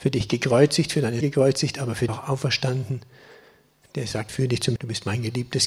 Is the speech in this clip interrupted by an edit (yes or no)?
yes